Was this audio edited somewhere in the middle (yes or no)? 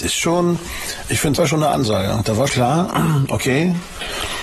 yes